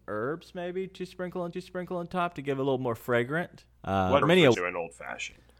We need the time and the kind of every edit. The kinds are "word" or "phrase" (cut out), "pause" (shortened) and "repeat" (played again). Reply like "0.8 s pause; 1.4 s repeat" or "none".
1.5 s repeat; 3.7 s pause; 4.2 s word; 4.5 s word